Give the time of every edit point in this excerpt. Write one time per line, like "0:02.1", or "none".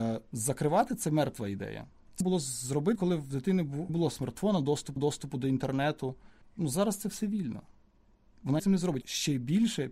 0:02.2
0:03.0
0:03.9
0:05.0
0:06.4
0:08.6
0:09.0